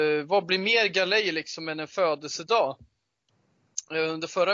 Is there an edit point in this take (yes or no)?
no